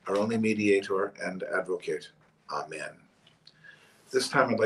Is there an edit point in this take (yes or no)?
yes